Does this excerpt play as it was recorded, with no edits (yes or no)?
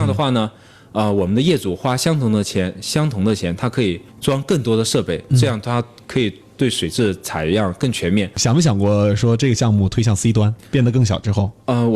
no